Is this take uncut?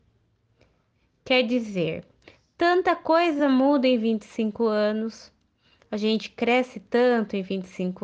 yes; 0 cuts

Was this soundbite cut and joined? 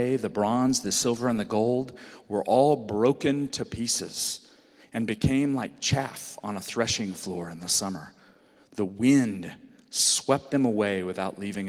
no; 0 cuts

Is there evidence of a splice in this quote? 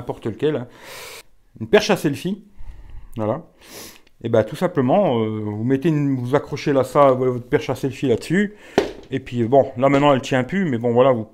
no; 0 cuts

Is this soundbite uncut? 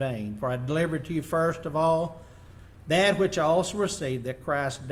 yes; 0 cuts

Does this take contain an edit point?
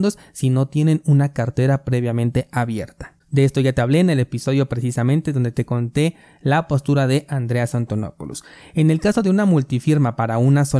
no; 0 cuts

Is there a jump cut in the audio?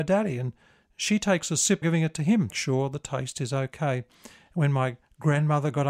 yes; 2 cuts; at 1.8 s, 2.5 s

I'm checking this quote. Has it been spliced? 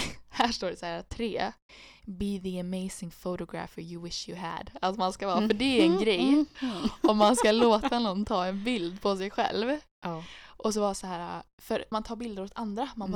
yes; 1 cut; at 11.9 s

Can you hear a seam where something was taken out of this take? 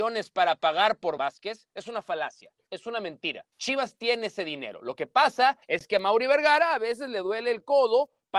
yes; 3 cuts; at 1.2 s, 3.5 s, 5.6 s

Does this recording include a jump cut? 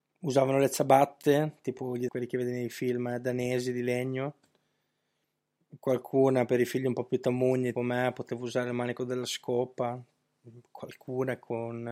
yes; 2 cuts; at 2.1 s, 7.7 s

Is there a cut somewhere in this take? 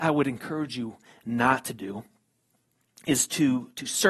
no; 0 cuts

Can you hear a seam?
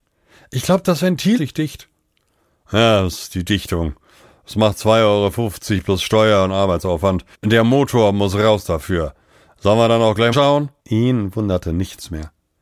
yes; 4 cuts; at 1.4 s, 7.3 s, 10.3 s, 10.8 s

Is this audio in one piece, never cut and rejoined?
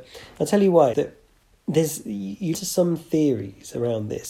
no; 3 cuts; at 0.9 s, 1.4 s, 2.5 s

